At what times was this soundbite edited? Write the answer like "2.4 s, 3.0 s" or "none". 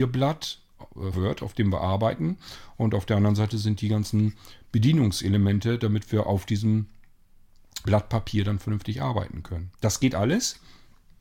1.1 s, 7.9 s, 9.7 s